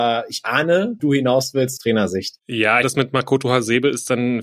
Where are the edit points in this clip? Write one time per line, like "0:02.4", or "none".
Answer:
0:01.0
0:01.8
0:02.8

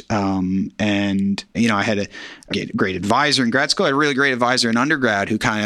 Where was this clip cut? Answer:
0:01.5
0:02.5

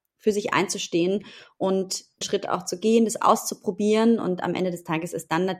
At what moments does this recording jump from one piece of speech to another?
0:02.2

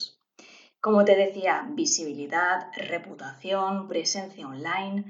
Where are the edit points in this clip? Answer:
0:03.9

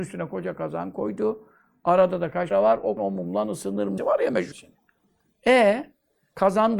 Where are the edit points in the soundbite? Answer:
0:02.5
0:03.0
0:04.0
0:04.5

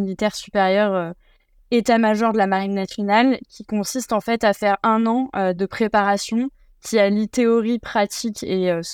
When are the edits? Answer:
none

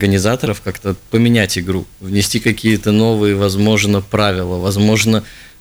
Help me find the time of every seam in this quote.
0:01.1

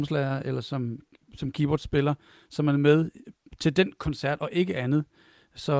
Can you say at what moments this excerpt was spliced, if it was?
none

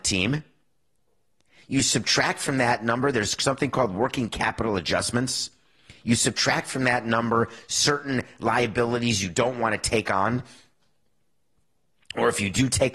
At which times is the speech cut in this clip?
none

